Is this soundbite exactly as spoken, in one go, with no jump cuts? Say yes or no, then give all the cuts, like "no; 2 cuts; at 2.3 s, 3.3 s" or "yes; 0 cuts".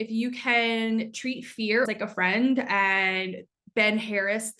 no; 1 cut; at 1.9 s